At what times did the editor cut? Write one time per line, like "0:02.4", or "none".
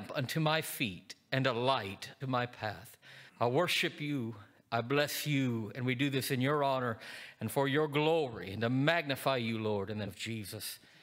0:02.2
0:03.3
0:10.1